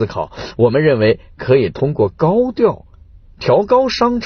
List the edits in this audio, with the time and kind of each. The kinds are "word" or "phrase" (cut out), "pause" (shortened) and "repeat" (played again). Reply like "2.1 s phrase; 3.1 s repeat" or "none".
none